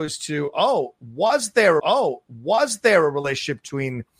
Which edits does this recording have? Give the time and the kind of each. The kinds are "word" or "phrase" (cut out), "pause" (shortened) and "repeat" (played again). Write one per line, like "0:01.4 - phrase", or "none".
0:01.8 - repeat